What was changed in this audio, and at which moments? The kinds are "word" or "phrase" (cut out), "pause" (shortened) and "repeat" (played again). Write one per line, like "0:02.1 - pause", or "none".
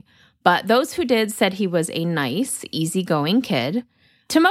none